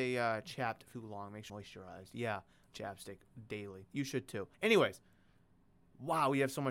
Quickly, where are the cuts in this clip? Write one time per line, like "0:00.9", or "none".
0:00.9
0:01.5
0:02.7
0:03.9
0:04.5